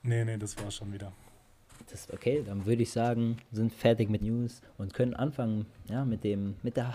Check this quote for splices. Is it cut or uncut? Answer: cut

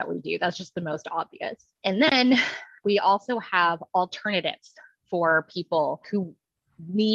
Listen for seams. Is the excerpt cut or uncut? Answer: uncut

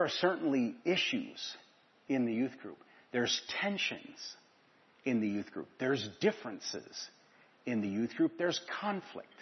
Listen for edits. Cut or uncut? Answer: uncut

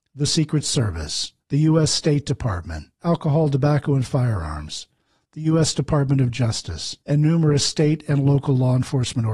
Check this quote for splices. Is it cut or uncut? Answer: cut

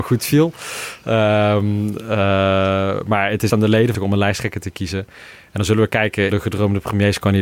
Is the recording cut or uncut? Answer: cut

